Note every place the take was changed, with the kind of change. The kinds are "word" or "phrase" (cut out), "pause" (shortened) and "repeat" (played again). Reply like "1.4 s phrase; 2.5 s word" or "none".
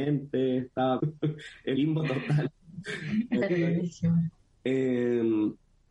1.0 s word; 1.7 s word; 4.4 s pause

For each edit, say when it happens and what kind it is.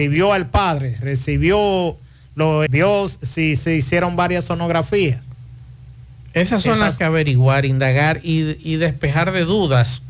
2.7 s word; 3.6 s word; 7.0 s phrase

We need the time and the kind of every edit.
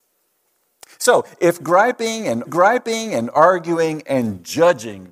2.5 s repeat

